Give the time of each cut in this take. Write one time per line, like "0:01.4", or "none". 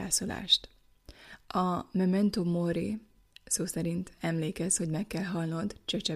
none